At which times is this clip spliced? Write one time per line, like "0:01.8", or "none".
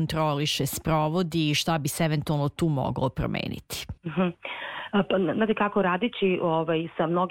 0:04.0

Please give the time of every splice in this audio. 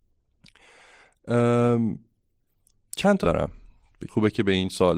0:03.2
0:04.1

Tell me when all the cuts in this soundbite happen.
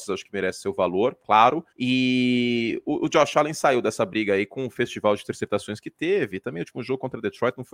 0:01.7

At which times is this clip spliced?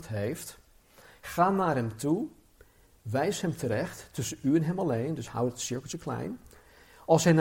none

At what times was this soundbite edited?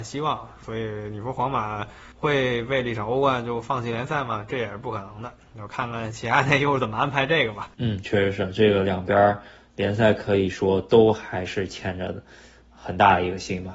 0:02.1
0:07.7

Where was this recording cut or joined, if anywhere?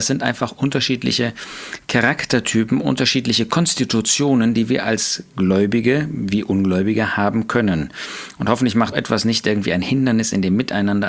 0:08.9

